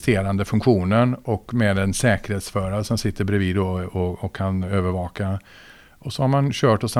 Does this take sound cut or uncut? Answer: uncut